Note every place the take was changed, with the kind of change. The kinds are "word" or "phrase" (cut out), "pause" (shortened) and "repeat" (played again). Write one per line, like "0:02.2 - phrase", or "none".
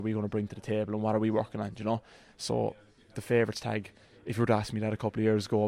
none

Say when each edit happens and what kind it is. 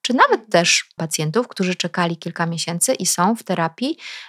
0:01.0 - word

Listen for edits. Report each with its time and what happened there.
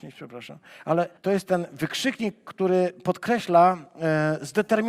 0:01.2 - pause

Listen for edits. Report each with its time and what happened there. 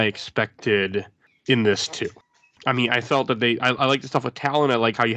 none

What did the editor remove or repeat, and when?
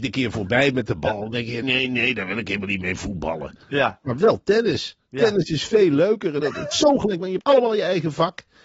0:01.6 - word
0:06.4 - word
0:06.7 - word
0:07.4 - word

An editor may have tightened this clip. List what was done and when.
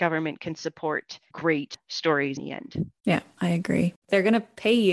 0:01.3 - word
0:02.4 - word
0:03.0 - pause
0:04.0 - pause

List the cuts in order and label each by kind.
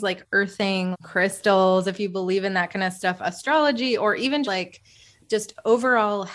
0:00.9 - word
0:04.4 - word

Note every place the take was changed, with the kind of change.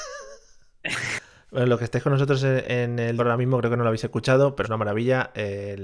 0:03.2 - word
0:04.6 - word

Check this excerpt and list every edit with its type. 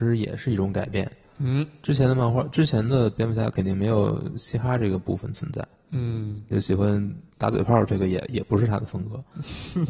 0:07.3 - pause

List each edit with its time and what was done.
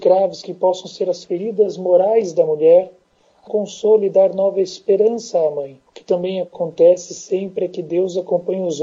0:03.5 - phrase
0:05.9 - pause

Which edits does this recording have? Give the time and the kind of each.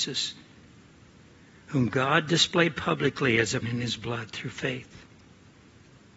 0:03.6 - word

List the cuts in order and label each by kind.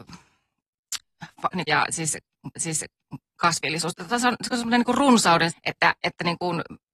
0:01.7 - phrase
0:02.6 - repeat
0:05.5 - word
0:06.0 - word

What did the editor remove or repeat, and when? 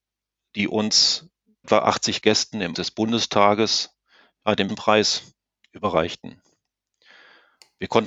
0:01.6 - word
0:02.2 - word
0:02.7 - word
0:04.7 - word

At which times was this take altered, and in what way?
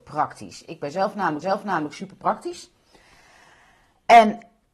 0:01.4 - repeat

